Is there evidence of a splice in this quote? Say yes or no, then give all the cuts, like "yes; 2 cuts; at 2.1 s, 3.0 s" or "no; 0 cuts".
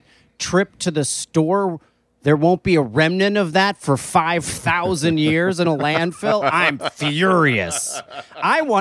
no; 0 cuts